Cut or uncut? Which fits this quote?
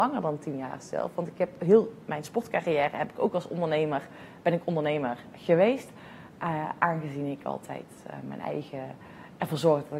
uncut